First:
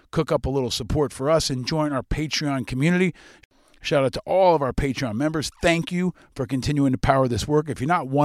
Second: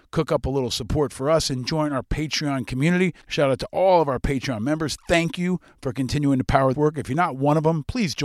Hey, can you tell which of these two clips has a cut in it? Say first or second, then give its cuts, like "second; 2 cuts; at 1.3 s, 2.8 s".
second; 2 cuts; at 3.2 s, 6.7 s